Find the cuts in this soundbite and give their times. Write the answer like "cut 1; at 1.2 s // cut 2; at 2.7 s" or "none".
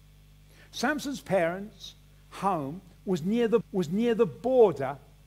cut 1; at 3.6 s